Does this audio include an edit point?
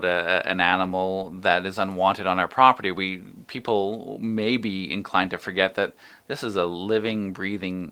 no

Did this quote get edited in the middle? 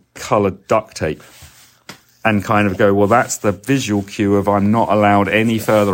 no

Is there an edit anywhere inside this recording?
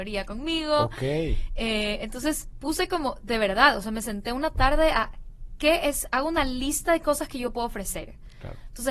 no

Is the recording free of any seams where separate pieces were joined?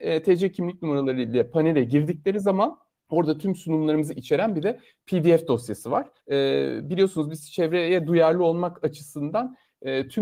no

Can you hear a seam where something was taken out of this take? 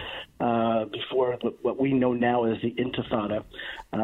no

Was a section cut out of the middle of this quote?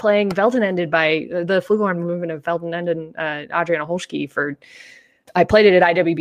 no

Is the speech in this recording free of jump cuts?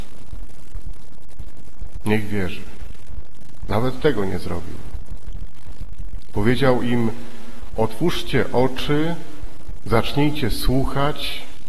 yes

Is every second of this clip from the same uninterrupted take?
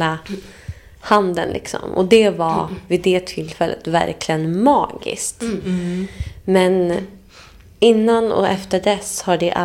yes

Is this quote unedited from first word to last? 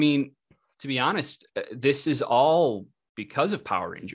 yes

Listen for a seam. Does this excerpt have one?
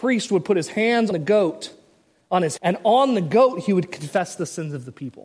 yes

